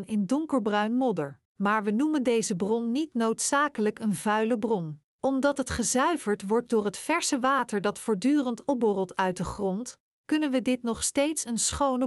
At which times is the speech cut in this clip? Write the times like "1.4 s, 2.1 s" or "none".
1.4 s, 5.1 s